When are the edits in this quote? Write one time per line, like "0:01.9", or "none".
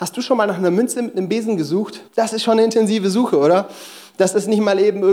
0:02.1